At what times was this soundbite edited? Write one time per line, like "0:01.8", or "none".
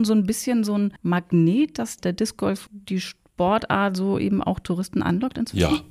0:01.0